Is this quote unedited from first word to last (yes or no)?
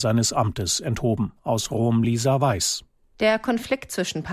yes